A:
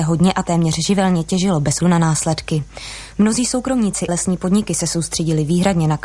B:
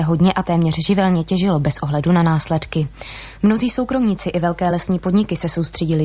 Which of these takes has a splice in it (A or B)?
A